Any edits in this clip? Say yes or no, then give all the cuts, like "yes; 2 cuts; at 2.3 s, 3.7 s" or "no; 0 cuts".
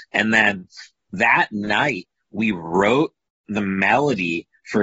no; 0 cuts